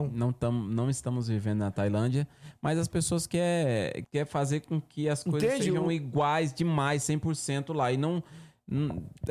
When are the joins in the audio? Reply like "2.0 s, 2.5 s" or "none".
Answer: 4.0 s